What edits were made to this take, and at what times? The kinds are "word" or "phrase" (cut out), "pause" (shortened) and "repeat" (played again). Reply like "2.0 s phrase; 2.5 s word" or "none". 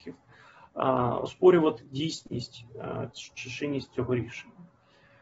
none